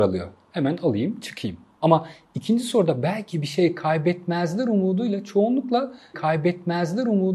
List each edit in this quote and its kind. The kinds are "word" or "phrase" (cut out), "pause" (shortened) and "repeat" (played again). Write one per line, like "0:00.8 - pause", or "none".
0:06.1 - repeat

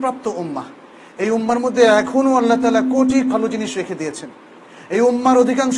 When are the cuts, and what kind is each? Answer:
0:03.3 - word

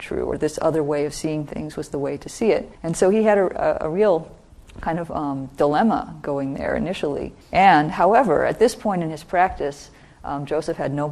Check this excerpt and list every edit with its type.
0:02.7 - pause
0:07.4 - pause

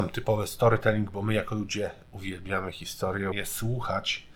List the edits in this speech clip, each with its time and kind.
0:03.3 - word

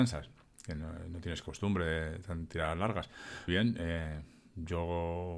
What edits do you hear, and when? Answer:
0:03.5 - phrase

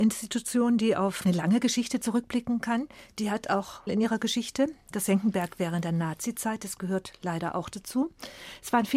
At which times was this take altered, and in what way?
0:03.9 - phrase

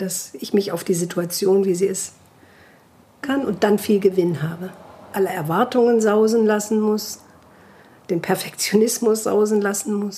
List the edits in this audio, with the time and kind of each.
0:03.2 - phrase
0:05.1 - word

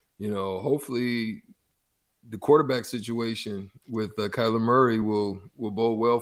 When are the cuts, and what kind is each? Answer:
none

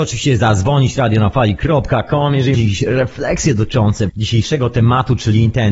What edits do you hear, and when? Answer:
0:02.5 - word
0:04.1 - word

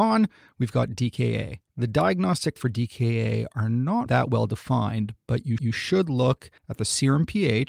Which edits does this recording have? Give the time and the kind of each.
0:01.7 - pause
0:02.6 - word
0:04.1 - word
0:05.6 - repeat
0:06.6 - pause

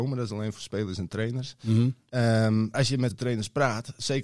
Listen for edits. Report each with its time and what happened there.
0:02.7 - word
0:03.1 - word

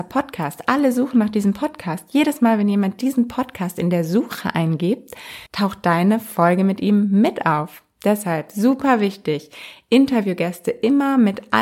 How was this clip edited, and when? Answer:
0:05.5 - pause

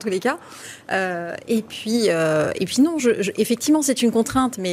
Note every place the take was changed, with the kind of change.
none

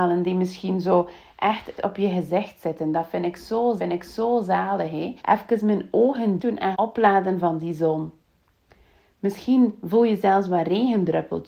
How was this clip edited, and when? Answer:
0:01.8 - word
0:03.8 - repeat
0:05.2 - pause
0:06.4 - word
0:06.7 - word

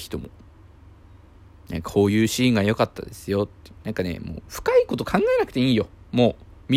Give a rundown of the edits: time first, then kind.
0:03.8 - pause

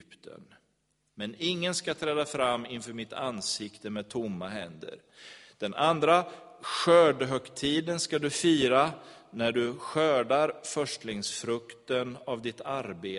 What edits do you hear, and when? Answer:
none

